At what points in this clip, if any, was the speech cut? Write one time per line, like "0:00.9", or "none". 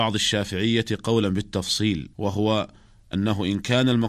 0:02.1